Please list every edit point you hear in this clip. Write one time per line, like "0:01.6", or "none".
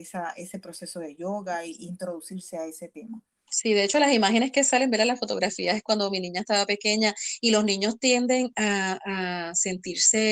none